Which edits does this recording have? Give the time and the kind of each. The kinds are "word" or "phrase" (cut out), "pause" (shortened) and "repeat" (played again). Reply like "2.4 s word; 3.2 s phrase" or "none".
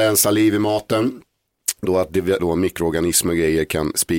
1.8 s word; 2.4 s word